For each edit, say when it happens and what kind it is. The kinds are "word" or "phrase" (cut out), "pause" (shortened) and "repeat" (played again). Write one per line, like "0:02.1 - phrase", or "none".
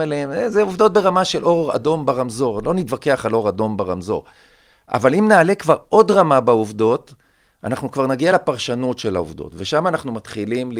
none

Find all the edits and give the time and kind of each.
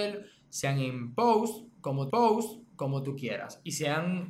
0:02.1 - repeat

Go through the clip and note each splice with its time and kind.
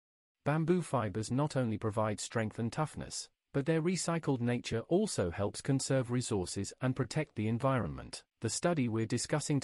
0:08.3 - pause

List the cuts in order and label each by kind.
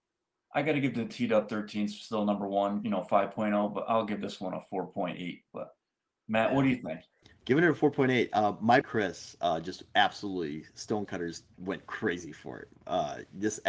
0:02.8 - phrase
0:05.5 - pause
0:07.2 - pause
0:08.8 - word

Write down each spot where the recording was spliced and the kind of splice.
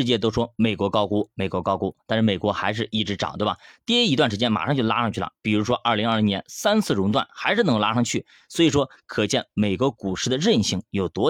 none

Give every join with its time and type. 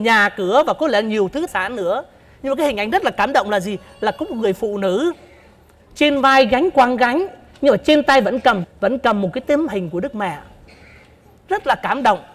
0:01.5 - word
0:08.6 - phrase

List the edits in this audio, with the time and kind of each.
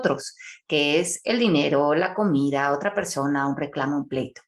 none

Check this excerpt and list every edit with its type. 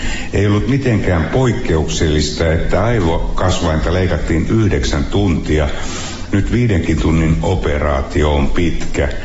none

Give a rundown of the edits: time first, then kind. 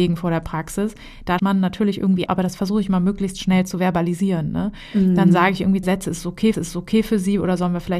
0:01.4 - word
0:02.3 - word
0:05.8 - word
0:06.5 - repeat

